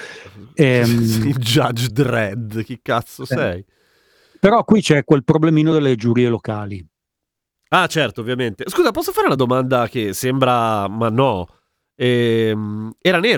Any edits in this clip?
no; 0 cuts

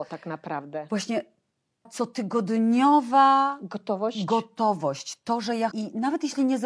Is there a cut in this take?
yes; 2 cuts; at 1.9 s, 5.7 s

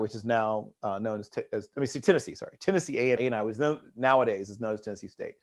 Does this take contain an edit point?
yes; 1 cut; at 3.2 s

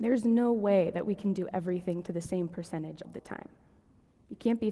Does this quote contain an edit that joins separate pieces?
yes; 1 cut; at 3.0 s

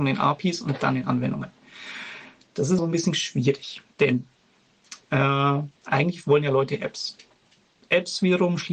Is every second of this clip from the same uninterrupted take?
no; 3 cuts; at 2.8 s, 3.9 s, 5.8 s

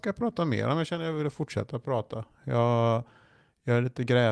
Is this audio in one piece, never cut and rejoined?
yes; 0 cuts

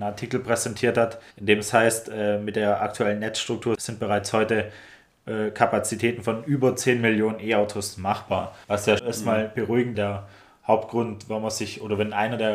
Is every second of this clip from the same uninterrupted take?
no; 4 cuts; at 1.3 s, 8.6 s, 9.0 s, 9.9 s

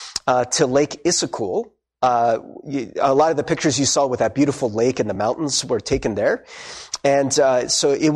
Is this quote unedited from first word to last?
yes; 0 cuts

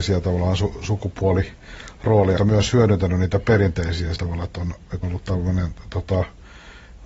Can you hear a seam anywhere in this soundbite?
yes; 3 cuts; at 2.4 s, 4.2 s, 5.0 s

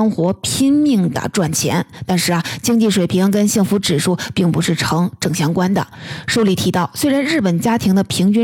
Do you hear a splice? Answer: no; 0 cuts

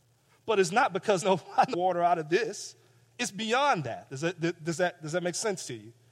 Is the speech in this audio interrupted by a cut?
yes; 2 cuts; at 1.2 s, 1.7 s

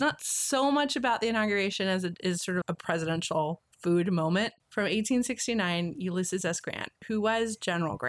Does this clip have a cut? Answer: yes; 3 cuts; at 2.6 s, 3.7 s, 4.6 s

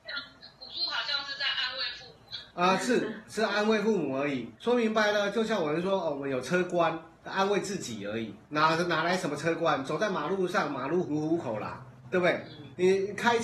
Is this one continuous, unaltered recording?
yes; 0 cuts

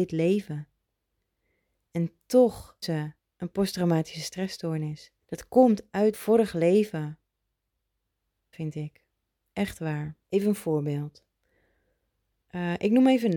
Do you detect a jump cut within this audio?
yes; 6 cuts; at 2.8 s, 3.2 s, 5.2 s, 6.1 s, 8.5 s, 10.2 s

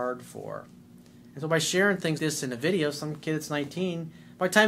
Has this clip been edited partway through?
yes; 1 cut; at 2.2 s

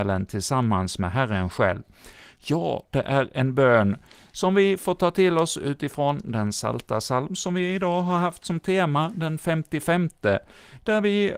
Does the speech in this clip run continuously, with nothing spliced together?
yes; 0 cuts

